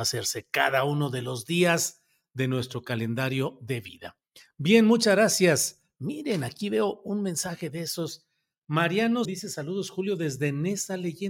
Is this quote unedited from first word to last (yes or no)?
no